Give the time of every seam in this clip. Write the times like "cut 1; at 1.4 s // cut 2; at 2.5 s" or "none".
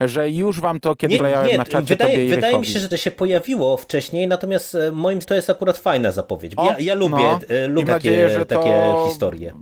cut 1; at 1.2 s // cut 2; at 2.9 s // cut 3; at 5.2 s // cut 4; at 6.6 s // cut 5; at 7.9 s